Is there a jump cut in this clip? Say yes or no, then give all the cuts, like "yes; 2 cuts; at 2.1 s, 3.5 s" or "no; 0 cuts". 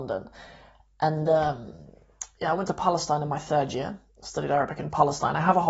no; 0 cuts